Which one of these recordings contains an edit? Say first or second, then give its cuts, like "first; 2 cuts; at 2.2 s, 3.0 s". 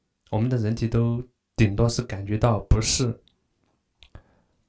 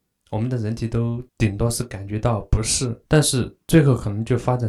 second; 2 cuts; at 1.3 s, 3.1 s